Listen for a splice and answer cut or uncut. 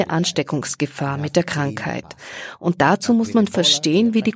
uncut